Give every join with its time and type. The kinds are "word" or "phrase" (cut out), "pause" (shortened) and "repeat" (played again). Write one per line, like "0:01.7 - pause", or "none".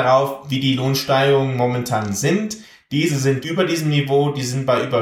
0:03.4 - word